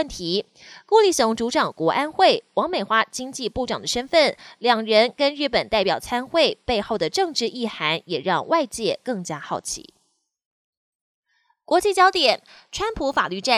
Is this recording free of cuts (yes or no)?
yes